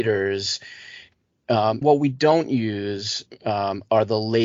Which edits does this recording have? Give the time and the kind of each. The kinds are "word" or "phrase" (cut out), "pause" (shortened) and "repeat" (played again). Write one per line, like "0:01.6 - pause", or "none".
0:01.8 - phrase